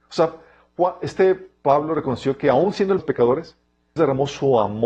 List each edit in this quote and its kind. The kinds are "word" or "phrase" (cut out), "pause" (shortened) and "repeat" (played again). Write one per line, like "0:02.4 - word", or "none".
0:03.0 - phrase
0:04.0 - word